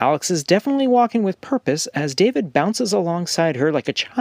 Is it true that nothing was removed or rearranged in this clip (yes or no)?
yes